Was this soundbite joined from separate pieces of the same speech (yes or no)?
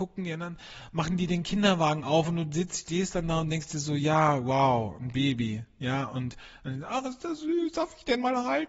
no